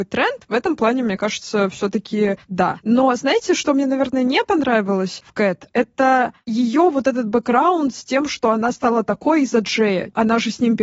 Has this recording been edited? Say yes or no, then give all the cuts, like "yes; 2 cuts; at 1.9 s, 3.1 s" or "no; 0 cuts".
no; 0 cuts